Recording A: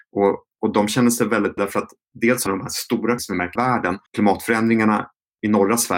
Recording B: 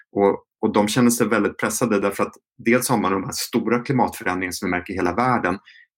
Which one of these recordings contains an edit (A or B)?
A